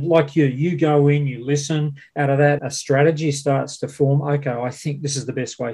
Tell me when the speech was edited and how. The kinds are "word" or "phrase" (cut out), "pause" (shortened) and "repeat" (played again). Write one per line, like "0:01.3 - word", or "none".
0:02.6 - word

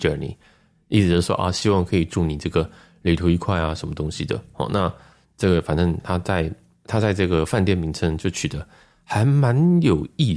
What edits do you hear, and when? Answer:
none

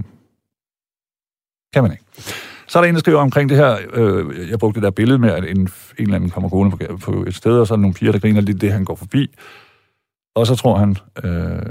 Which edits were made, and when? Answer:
none

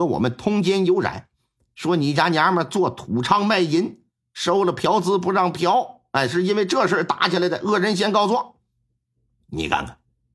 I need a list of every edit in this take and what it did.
none

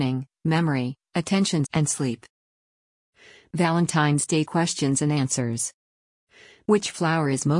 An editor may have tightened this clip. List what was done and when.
0:01.6 - word
0:04.4 - word

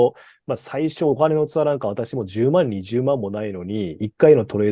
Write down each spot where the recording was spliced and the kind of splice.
none

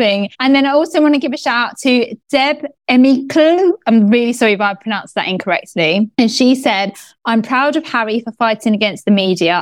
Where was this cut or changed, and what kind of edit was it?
none

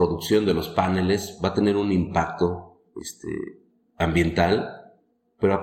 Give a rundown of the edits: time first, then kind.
0:02.9 - pause

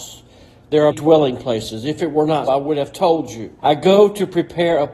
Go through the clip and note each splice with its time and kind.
0:00.9 - word
0:02.5 - word
0:03.6 - pause

